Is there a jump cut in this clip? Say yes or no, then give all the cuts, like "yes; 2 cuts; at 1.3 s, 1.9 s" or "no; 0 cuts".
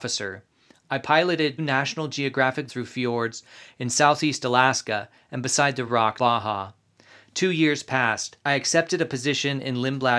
yes; 5 cuts; at 1.6 s, 2.7 s, 5.9 s, 6.2 s, 8.4 s